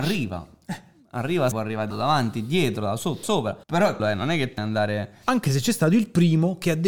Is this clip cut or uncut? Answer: cut